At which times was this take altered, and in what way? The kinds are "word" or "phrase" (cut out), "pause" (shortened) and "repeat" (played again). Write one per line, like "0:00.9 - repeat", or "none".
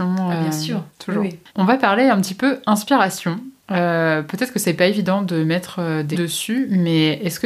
0:01.5 - pause
0:03.6 - pause
0:06.1 - word

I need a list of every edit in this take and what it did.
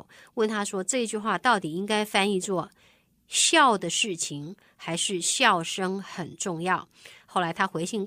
none

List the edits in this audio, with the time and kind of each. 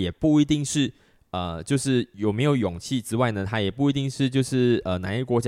none

